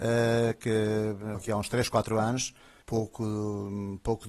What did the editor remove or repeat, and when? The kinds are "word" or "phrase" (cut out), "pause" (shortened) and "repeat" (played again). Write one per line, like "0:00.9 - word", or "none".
0:01.3 - word
0:02.8 - word